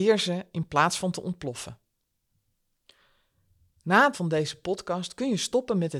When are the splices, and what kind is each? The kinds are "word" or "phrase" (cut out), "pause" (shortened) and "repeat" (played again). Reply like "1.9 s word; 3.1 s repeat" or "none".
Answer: 4.1 s word

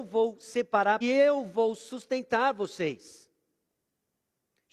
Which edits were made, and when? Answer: 1.0 s phrase

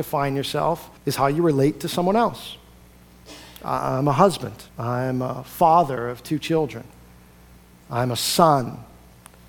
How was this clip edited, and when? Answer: 1.0 s pause; 4.7 s pause

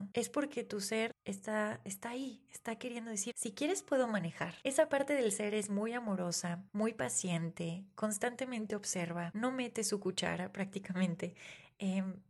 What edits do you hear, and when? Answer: 3.3 s word

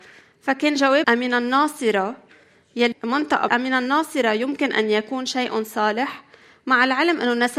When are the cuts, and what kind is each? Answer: 1.0 s word; 2.9 s word; 3.5 s word

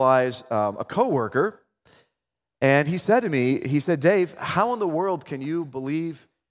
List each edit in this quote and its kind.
none

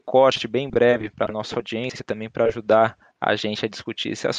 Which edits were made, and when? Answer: none

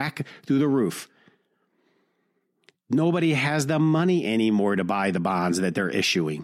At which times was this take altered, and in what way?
none

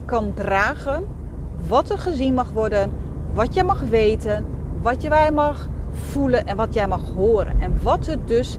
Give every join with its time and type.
none

